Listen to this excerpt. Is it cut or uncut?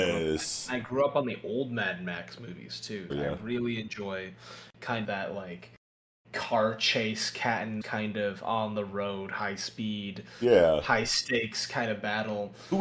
cut